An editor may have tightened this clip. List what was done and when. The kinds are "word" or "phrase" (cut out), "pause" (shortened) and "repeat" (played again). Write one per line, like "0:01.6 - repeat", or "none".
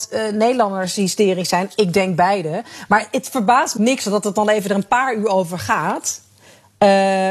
0:03.8 - phrase